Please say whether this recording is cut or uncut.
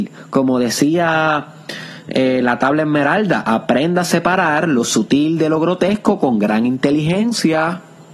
uncut